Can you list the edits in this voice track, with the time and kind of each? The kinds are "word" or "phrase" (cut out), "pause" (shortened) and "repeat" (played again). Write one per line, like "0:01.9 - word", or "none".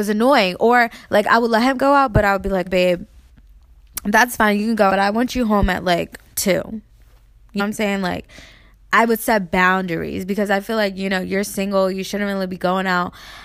0:02.7 - word
0:04.9 - word
0:07.6 - word